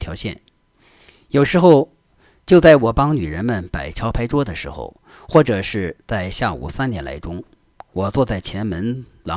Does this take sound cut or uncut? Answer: uncut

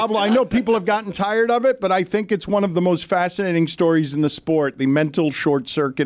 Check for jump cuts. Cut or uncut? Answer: uncut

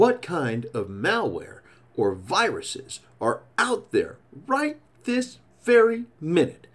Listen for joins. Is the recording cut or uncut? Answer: uncut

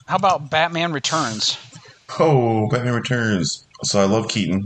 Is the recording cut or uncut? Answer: uncut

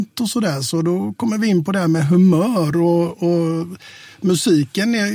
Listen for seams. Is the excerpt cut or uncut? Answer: uncut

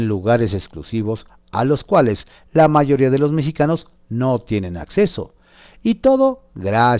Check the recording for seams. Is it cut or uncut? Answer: uncut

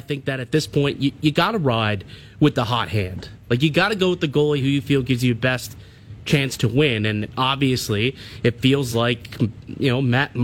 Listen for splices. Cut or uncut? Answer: uncut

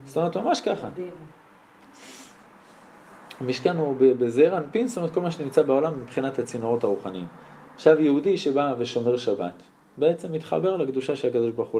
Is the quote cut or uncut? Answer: uncut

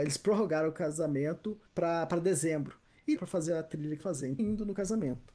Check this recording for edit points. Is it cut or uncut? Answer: cut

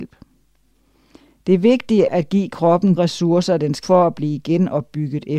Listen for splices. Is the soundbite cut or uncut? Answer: cut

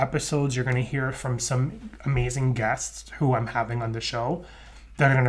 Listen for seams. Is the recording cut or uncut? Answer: uncut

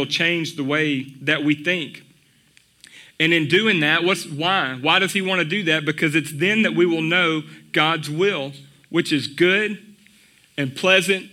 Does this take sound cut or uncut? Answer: uncut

